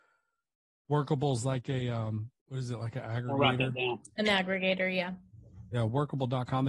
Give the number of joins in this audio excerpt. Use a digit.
1